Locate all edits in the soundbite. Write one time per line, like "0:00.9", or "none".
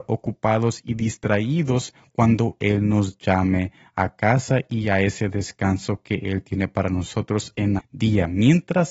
0:07.8